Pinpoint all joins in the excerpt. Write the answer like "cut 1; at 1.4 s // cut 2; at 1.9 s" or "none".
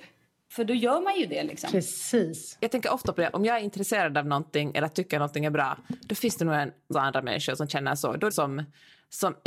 cut 1; at 6.9 s // cut 2; at 8.3 s

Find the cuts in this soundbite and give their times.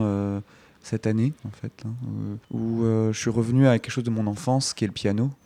cut 1; at 1.4 s // cut 2; at 2.4 s

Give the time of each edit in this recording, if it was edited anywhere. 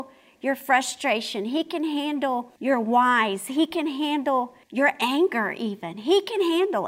cut 1; at 2.6 s // cut 2; at 4.6 s

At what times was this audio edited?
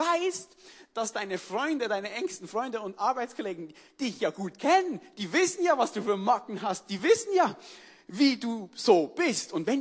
none

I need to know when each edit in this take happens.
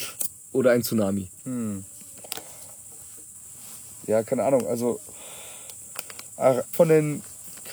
cut 1; at 1.4 s // cut 2; at 6.7 s

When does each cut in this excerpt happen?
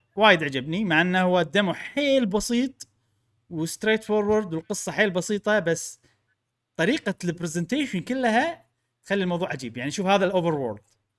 none

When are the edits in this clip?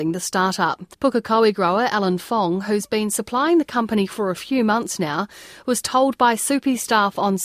cut 1; at 0.9 s

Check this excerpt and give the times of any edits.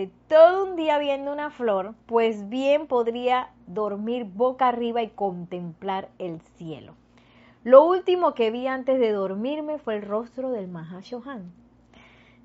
cut 1; at 2.0 s

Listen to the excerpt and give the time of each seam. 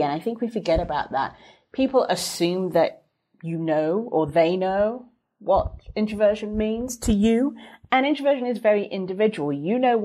none

